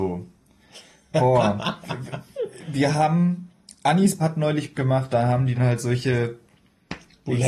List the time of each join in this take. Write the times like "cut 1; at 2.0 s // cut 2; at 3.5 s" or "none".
cut 1; at 4.2 s // cut 2; at 4.7 s // cut 3; at 5.1 s // cut 4; at 5.5 s